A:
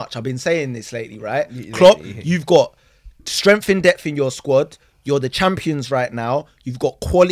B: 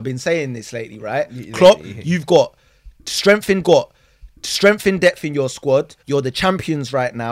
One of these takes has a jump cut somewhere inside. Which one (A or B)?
B